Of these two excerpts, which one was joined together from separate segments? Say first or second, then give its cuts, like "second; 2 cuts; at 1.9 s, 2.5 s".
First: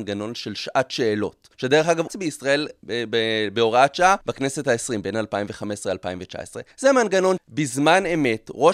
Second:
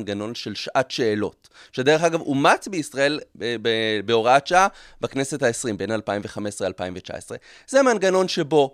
first; 5 cuts; at 1.5 s, 2.1 s, 4.2 s, 6.7 s, 7.4 s